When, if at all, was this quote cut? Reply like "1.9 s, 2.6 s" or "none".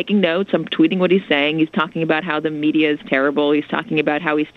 none

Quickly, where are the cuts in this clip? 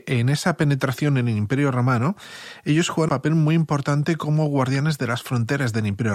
3.1 s

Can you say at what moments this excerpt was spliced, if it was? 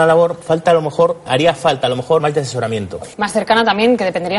1.3 s, 2.2 s, 3.1 s

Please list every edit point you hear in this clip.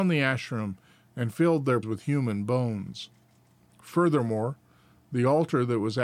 1.8 s

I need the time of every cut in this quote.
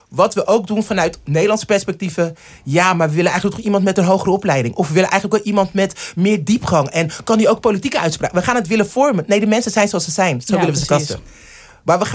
none

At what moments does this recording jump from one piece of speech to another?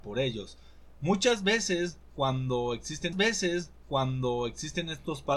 3.1 s

